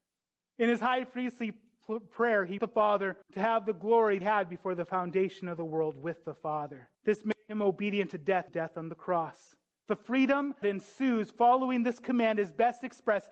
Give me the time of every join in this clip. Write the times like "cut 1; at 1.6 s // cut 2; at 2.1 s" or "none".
cut 1; at 2.6 s // cut 2; at 3.2 s // cut 3; at 4.2 s // cut 4; at 6.9 s // cut 5; at 8.5 s // cut 6; at 9.7 s // cut 7; at 10.6 s